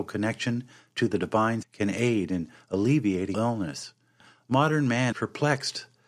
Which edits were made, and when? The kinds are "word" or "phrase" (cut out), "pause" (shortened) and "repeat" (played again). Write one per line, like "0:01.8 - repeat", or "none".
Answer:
0:01.6 - word
0:03.3 - word
0:05.1 - word